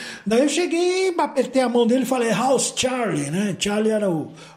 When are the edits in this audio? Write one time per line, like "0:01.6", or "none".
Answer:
none